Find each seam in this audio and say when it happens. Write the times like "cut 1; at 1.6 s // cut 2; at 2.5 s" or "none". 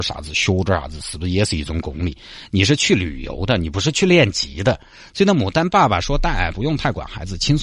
cut 1; at 6.5 s